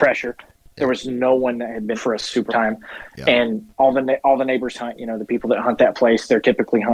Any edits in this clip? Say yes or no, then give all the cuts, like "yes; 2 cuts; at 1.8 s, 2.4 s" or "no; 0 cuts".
yes; 3 cuts; at 1.9 s, 2.5 s, 3.7 s